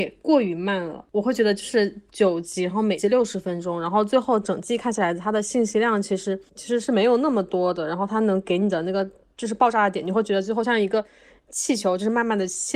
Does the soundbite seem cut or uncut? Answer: uncut